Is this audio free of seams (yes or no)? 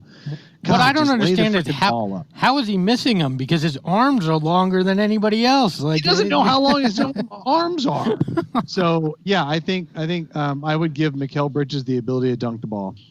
yes